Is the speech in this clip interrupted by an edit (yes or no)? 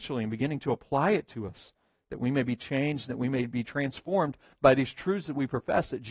no